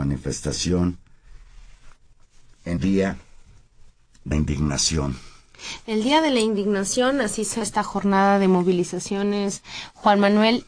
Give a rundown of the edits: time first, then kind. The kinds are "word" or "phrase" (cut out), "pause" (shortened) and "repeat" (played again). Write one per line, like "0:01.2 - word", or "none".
0:02.8 - word
0:04.3 - word
0:07.6 - word

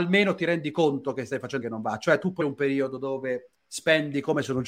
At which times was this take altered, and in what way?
0:01.6 - word
0:02.4 - word

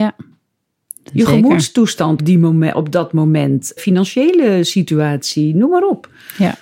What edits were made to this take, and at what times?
0:02.2 - word
0:03.8 - word

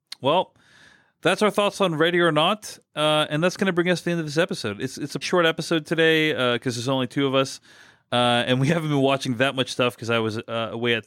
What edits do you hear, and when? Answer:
0:05.2 - word

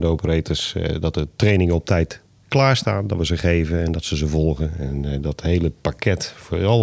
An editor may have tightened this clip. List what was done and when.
none

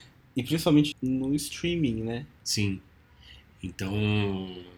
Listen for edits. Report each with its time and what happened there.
0:00.9 - word

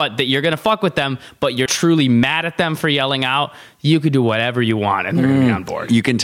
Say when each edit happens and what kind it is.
0:01.7 - word

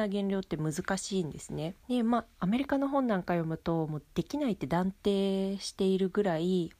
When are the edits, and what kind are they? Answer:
0:01.8 - pause

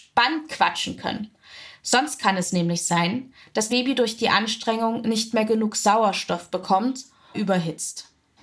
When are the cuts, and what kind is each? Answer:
0:03.7 - word
0:07.3 - word

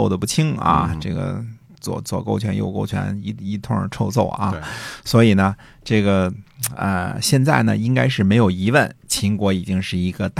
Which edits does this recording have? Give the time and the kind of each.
none

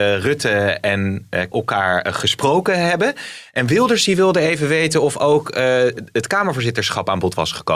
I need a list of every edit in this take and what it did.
0:01.5 - word

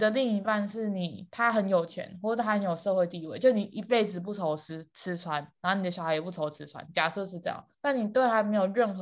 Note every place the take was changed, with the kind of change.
0:07.7 - pause

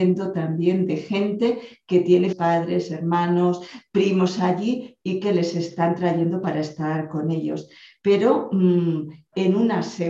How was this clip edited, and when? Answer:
0:02.3 - word

